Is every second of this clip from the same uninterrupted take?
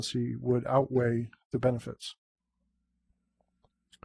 yes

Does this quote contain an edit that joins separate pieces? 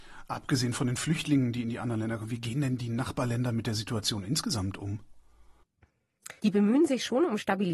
yes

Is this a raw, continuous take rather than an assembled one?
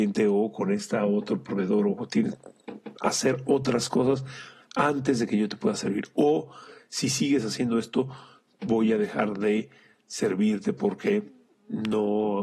yes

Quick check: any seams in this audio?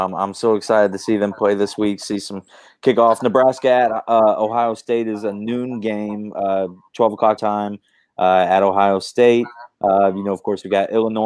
yes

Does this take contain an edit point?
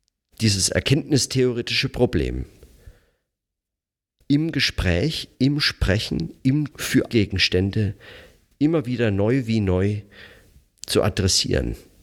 yes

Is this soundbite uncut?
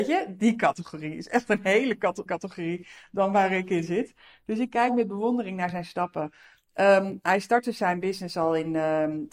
no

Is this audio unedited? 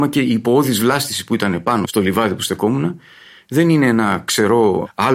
yes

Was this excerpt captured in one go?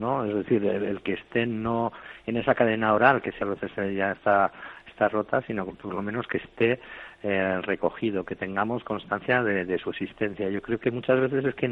no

